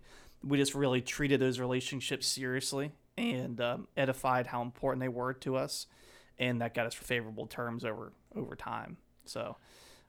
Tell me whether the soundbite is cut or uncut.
cut